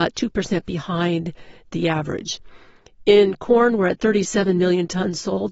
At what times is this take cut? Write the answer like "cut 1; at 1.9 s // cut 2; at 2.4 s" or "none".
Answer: none